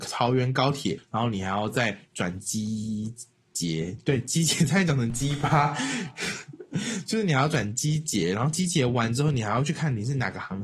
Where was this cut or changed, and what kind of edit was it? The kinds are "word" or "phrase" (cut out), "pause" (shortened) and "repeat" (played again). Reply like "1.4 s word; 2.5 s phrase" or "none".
none